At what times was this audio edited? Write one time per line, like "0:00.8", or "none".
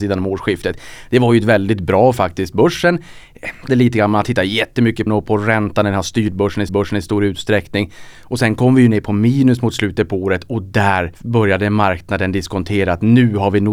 0:02.1
0:03.7
0:05.1
0:06.7
0:11.1